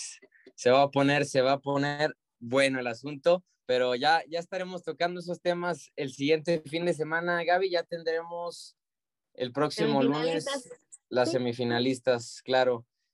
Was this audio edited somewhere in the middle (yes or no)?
no